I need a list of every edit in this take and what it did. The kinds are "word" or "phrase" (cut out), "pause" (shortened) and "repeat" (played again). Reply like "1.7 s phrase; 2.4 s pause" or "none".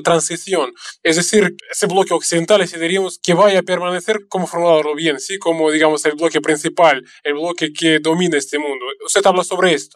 1.6 s word